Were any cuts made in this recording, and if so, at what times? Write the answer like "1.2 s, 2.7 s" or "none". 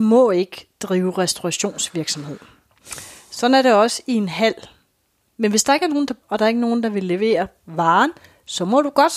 6.2 s